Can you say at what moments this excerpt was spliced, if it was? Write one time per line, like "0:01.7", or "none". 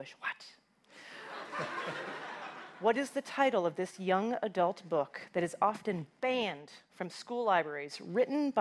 none